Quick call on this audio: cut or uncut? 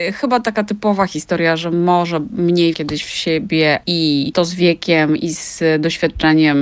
cut